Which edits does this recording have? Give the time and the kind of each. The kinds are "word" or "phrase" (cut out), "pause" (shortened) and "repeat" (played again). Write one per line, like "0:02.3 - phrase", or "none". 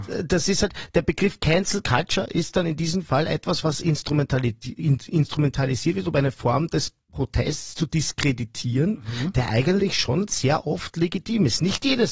none